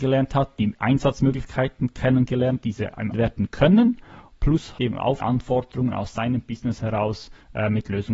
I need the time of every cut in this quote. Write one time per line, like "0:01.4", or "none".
0:02.6
0:03.1
0:04.8
0:05.2